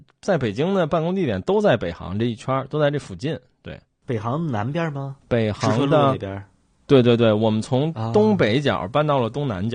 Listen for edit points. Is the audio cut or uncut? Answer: uncut